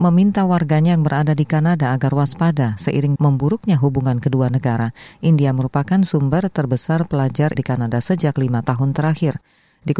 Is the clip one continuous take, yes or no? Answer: no